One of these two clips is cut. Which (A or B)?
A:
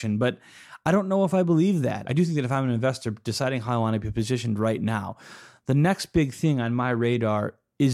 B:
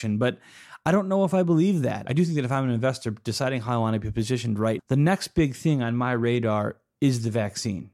B